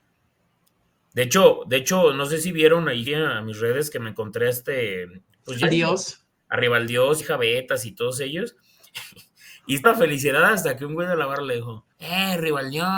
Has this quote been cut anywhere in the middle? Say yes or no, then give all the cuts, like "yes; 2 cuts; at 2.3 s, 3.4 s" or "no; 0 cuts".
yes; 5 cuts; at 3.1 s, 5.6 s, 7.2 s, 9.8 s, 11.9 s